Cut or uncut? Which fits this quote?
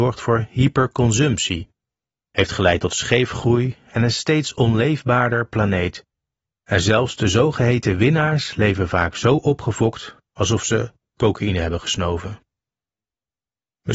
uncut